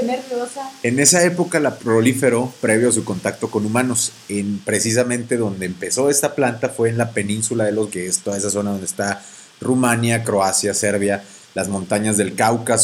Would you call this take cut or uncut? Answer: cut